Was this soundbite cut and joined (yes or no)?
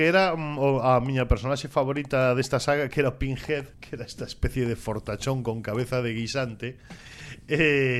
yes